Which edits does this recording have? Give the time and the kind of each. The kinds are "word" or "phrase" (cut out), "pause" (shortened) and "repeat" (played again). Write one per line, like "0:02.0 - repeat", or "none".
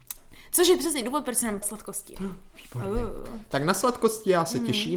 0:01.6 - word